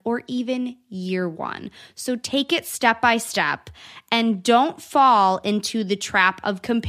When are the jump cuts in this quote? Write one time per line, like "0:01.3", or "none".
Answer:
none